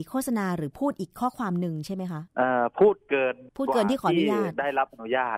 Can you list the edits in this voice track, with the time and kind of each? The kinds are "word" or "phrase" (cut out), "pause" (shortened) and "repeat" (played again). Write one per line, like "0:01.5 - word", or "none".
0:02.3 - pause
0:03.5 - pause